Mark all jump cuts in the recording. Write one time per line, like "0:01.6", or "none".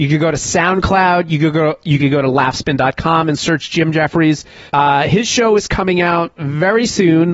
0:04.7